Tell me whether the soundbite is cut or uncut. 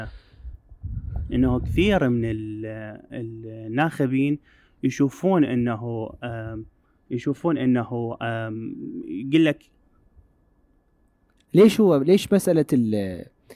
uncut